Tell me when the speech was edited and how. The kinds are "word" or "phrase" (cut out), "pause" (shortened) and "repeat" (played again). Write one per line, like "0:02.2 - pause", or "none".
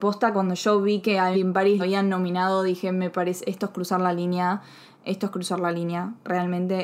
0:01.3 - word
0:01.8 - word